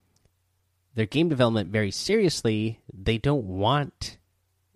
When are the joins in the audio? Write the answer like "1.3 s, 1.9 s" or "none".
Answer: none